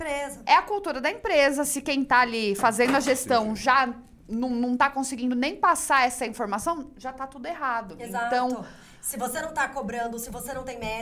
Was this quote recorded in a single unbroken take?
yes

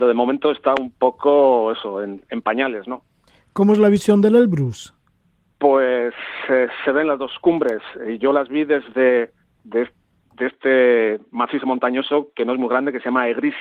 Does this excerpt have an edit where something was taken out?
no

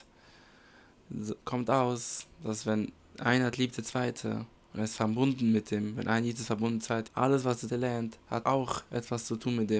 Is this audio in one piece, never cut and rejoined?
no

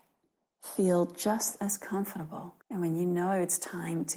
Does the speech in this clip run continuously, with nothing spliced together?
no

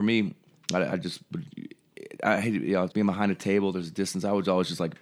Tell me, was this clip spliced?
yes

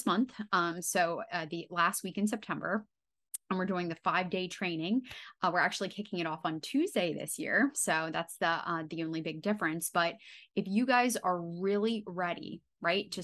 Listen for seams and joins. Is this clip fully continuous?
yes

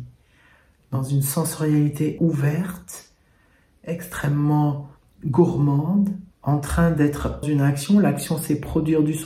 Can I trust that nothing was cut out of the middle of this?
no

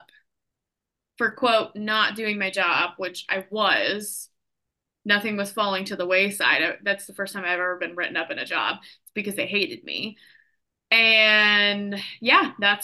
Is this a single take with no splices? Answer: yes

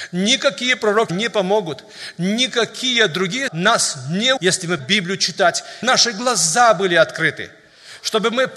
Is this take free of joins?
no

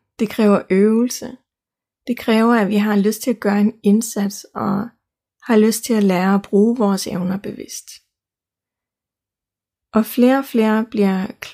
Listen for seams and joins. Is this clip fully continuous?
yes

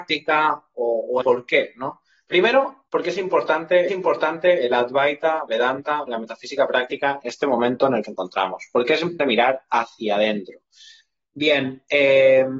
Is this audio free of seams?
no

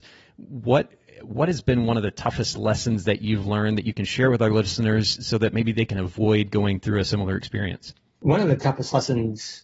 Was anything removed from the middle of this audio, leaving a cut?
no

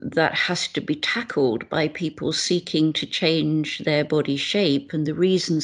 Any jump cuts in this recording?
no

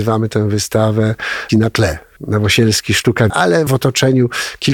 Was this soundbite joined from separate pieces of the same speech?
yes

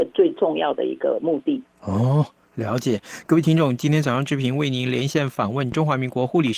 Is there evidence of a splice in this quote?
no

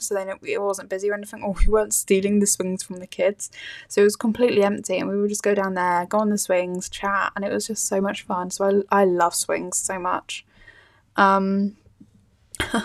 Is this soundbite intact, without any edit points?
yes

